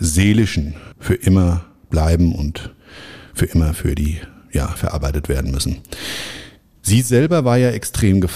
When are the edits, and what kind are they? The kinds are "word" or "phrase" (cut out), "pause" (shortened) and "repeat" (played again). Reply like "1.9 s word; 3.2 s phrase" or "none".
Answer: 0.9 s pause; 4.8 s word